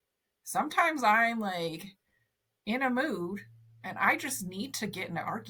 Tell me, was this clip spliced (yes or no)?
no